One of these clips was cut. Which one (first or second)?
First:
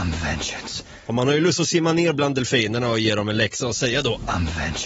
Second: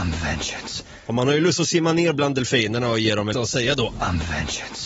second